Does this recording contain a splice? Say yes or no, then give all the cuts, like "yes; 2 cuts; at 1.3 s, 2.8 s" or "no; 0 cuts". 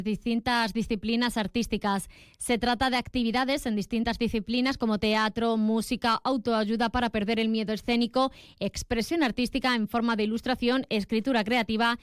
no; 0 cuts